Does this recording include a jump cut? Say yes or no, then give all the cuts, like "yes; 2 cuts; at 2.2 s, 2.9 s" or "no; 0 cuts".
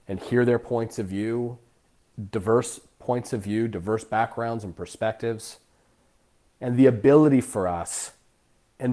no; 0 cuts